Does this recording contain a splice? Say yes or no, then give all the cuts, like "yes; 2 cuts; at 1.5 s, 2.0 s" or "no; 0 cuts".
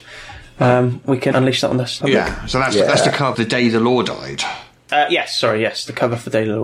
yes; 3 cuts; at 1.3 s, 2.0 s, 3.3 s